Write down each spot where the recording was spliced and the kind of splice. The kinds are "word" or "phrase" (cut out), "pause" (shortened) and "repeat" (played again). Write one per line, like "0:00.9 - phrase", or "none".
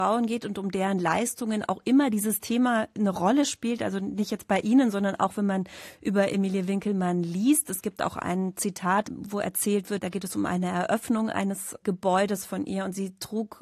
none